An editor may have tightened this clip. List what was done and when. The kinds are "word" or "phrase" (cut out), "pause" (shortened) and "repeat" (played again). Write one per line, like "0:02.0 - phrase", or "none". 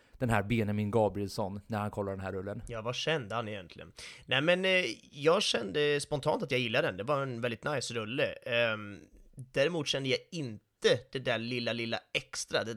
none